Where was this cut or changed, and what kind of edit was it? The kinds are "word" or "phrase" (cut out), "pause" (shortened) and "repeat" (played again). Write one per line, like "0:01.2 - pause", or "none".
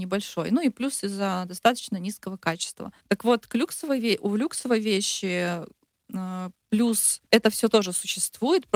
0:03.0 - pause
0:07.3 - pause